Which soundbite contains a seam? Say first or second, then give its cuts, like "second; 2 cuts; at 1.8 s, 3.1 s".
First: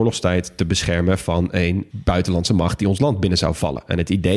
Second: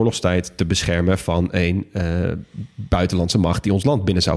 first; 1 cut; at 1.9 s